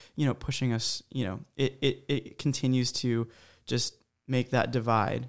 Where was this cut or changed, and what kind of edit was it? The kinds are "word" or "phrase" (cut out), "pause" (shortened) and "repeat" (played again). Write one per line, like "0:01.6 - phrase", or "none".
none